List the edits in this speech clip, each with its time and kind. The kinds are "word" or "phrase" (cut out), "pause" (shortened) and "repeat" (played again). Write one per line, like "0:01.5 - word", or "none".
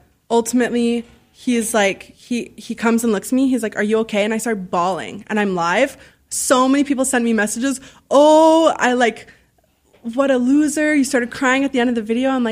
none